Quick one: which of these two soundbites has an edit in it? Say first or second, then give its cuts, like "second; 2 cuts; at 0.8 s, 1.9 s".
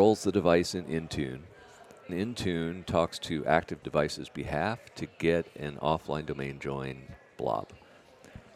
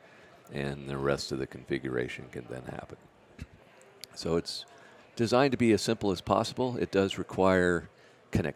first; 2 cuts; at 2.1 s, 3.8 s